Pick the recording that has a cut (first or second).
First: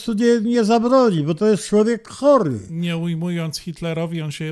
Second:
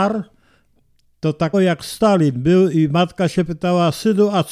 second